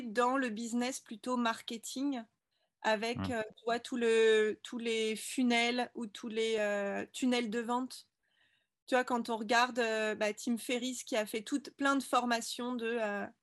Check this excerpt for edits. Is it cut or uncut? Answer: uncut